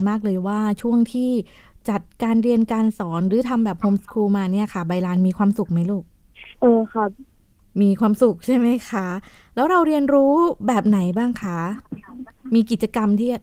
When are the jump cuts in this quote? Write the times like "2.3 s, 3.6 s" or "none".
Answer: none